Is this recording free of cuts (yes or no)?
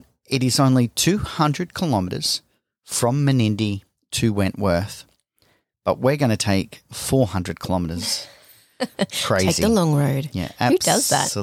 yes